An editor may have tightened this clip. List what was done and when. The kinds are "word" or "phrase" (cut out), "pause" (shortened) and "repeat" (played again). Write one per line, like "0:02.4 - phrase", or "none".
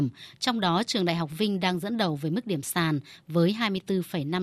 none